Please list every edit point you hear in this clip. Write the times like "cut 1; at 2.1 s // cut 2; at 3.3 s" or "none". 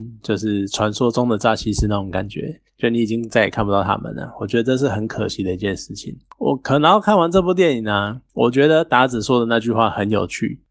none